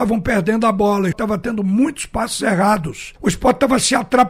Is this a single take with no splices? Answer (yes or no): no